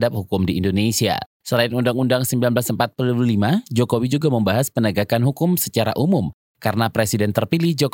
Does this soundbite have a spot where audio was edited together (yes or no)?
no